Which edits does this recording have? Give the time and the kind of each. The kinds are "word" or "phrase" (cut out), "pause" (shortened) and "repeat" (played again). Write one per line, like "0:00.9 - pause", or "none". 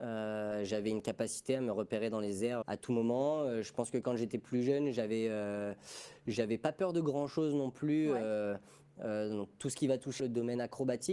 0:02.6 - word
0:10.2 - word